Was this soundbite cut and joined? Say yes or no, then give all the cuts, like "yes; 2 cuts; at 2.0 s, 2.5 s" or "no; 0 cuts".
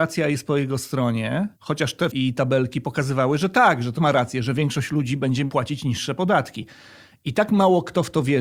yes; 3 cuts; at 1.5 s, 2.1 s, 4.0 s